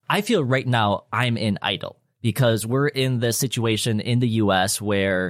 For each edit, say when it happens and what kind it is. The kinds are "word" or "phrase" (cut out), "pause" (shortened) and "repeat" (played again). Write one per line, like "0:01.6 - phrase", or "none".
none